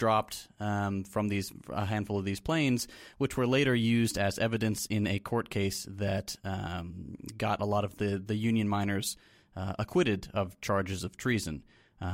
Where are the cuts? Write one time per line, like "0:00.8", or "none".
none

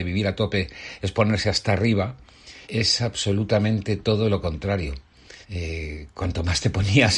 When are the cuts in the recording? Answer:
0:02.6
0:05.4

